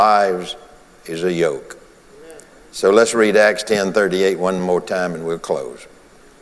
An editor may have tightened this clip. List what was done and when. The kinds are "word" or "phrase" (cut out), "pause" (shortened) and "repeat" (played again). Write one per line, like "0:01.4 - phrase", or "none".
none